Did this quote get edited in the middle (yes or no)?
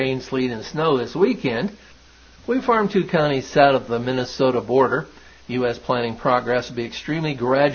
yes